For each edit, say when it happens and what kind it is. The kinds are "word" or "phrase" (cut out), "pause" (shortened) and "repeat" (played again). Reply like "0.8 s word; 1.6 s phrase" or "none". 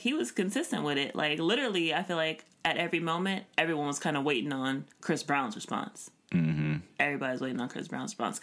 2.5 s pause; 4.9 s pause